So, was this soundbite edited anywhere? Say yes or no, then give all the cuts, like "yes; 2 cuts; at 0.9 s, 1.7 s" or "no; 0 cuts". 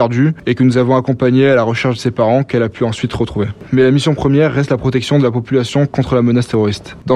no; 0 cuts